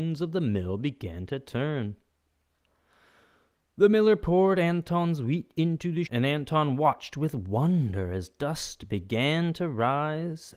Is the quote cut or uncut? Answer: cut